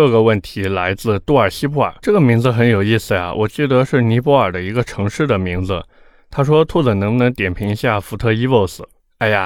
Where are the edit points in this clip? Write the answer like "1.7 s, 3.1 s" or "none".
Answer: 2.0 s